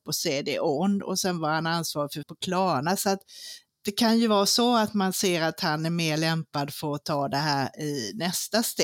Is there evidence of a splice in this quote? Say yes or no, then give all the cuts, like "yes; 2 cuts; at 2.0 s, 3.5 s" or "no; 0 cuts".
yes; 1 cut; at 2.2 s